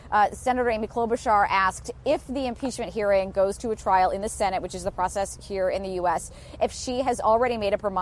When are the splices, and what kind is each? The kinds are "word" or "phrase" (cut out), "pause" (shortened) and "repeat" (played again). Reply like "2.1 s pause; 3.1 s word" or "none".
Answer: none